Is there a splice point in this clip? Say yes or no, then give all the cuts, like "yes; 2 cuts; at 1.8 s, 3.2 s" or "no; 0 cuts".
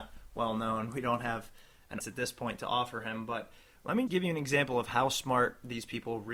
yes; 2 cuts; at 2.0 s, 4.1 s